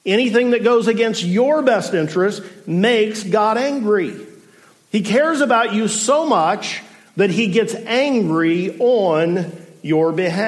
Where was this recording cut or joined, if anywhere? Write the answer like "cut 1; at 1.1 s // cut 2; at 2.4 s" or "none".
none

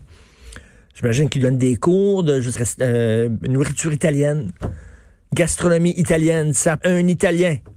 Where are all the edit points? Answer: cut 1; at 2.5 s // cut 2; at 6.8 s

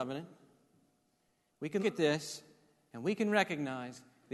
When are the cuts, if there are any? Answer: cut 1; at 1.8 s

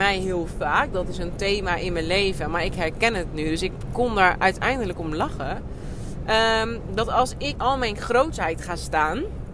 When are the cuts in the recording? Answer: cut 1; at 7.5 s

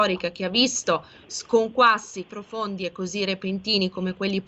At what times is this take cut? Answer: cut 1; at 2.3 s

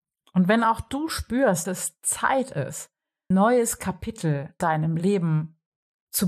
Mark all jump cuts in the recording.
cut 1; at 1.6 s // cut 2; at 3.3 s // cut 3; at 4.6 s

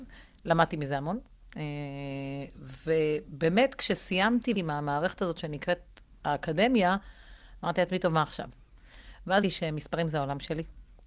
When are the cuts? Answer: cut 1; at 4.6 s // cut 2; at 9.4 s

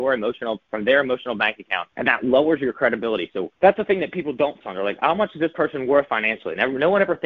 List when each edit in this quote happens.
cut 1; at 1.9 s // cut 2; at 3.5 s // cut 3; at 4.6 s // cut 4; at 6.1 s

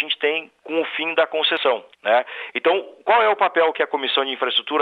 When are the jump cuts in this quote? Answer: cut 1; at 1.9 s

